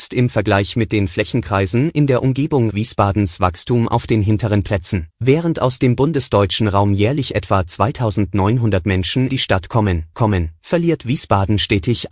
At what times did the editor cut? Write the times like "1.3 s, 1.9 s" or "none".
2.7 s, 5.1 s, 9.3 s, 10.1 s